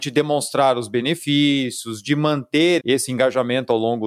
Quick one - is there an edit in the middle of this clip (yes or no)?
yes